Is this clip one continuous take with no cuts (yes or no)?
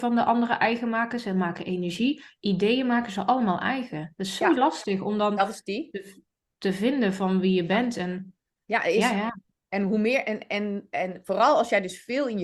yes